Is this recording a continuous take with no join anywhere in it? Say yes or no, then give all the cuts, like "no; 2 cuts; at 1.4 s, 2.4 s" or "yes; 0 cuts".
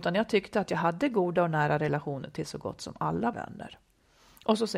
no; 1 cut; at 3.3 s